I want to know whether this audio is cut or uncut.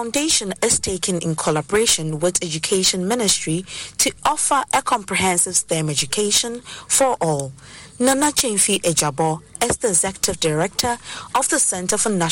uncut